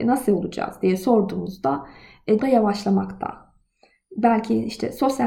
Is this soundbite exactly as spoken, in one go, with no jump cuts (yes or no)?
no